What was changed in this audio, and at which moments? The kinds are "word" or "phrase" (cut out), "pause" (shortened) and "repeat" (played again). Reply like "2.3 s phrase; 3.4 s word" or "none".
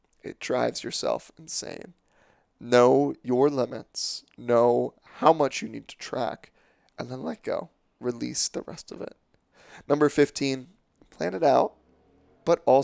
none